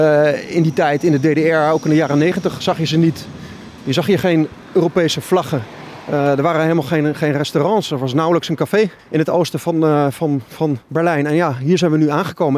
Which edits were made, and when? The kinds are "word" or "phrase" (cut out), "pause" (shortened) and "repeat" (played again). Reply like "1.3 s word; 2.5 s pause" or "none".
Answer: 9.0 s pause; 10.8 s pause